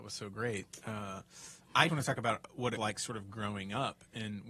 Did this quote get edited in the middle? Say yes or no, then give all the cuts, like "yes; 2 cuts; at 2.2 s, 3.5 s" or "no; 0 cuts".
yes; 2 cuts; at 1.9 s, 2.8 s